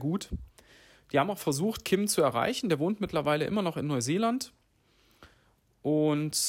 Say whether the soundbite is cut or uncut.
uncut